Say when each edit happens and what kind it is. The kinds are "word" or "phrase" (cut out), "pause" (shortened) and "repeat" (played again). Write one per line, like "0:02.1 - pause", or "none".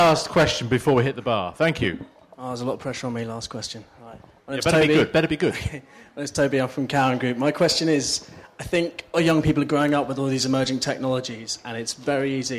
0:09.1 - word